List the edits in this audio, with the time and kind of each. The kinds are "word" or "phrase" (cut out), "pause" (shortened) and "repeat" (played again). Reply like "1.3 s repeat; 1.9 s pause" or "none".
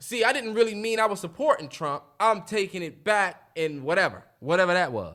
none